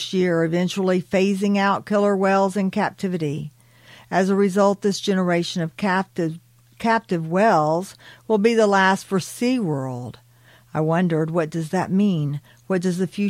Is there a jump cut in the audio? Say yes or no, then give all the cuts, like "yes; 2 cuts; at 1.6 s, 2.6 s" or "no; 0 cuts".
no; 0 cuts